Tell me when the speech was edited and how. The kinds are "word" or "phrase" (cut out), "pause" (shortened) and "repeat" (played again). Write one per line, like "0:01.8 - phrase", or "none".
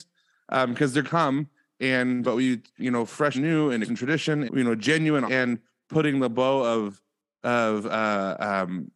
0:01.0 - word
0:02.2 - word
0:02.8 - word
0:03.3 - word
0:03.8 - word
0:04.5 - word
0:05.3 - word
0:05.8 - word